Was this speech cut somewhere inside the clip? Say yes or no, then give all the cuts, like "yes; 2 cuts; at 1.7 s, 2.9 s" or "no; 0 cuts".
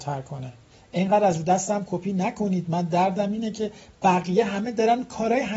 no; 0 cuts